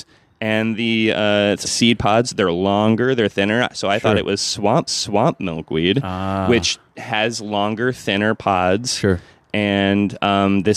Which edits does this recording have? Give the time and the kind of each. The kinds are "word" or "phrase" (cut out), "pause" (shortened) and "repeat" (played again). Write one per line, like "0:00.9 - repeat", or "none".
0:01.6 - phrase
0:04.9 - repeat